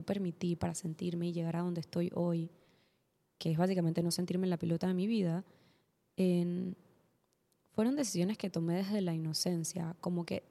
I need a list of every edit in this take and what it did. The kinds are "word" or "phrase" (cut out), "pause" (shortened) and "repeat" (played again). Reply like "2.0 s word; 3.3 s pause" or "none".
none